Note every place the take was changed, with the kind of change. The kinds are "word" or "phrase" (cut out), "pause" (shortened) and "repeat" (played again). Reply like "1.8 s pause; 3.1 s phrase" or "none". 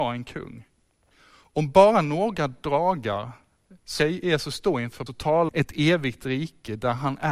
1.1 s pause; 4.0 s word; 5.1 s word; 5.5 s word